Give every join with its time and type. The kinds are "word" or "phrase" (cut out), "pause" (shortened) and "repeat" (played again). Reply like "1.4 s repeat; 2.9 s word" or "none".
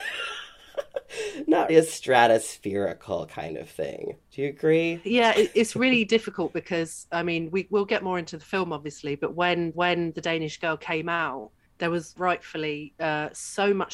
1.7 s word; 4.2 s pause; 9.7 s repeat; 11.6 s pause; 12.2 s word